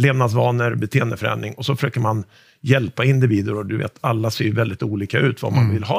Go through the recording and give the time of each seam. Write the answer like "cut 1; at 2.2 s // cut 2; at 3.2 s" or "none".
none